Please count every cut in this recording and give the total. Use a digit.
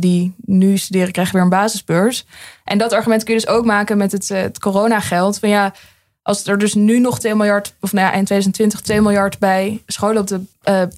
0